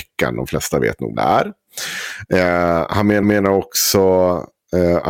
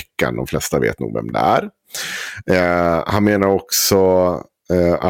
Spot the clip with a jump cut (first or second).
first